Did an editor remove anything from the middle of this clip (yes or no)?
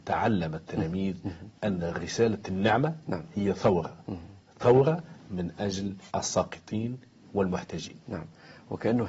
yes